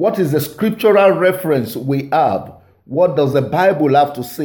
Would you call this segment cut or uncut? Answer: uncut